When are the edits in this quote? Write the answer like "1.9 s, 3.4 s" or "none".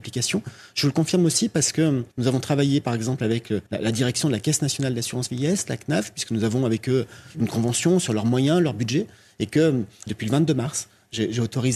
2.1 s, 3.7 s, 10.1 s